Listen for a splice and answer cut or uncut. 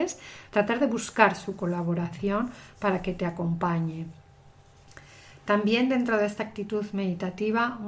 uncut